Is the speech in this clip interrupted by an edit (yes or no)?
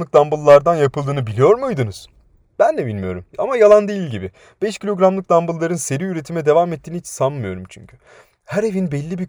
yes